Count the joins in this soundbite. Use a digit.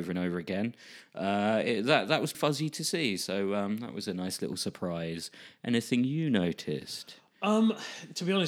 1